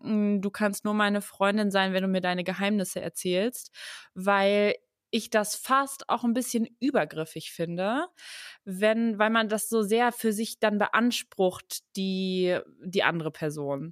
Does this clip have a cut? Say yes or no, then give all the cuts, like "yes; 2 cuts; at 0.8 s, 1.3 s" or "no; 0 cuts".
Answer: no; 0 cuts